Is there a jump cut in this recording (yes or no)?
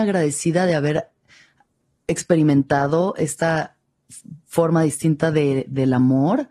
no